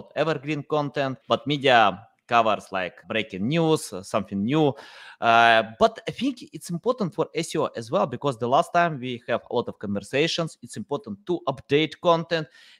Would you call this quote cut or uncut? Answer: cut